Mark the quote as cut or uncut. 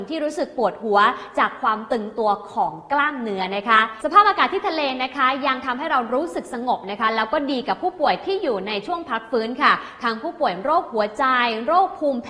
uncut